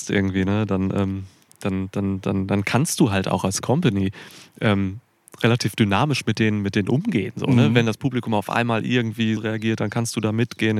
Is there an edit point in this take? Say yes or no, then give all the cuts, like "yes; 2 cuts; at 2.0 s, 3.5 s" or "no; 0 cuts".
yes; 1 cut; at 9.4 s